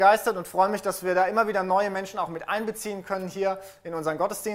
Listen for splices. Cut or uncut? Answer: uncut